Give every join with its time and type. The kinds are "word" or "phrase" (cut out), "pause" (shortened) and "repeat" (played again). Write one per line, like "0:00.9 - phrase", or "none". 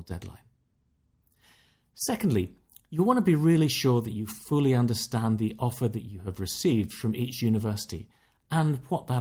none